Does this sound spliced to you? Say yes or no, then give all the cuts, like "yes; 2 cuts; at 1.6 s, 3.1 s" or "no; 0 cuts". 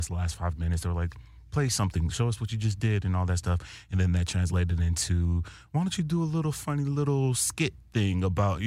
no; 0 cuts